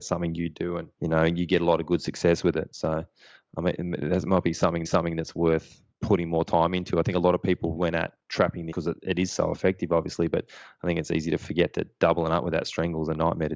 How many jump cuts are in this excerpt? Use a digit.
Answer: 6